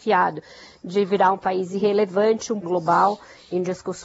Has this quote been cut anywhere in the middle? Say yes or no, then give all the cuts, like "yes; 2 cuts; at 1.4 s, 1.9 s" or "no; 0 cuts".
yes; 1 cut; at 2.6 s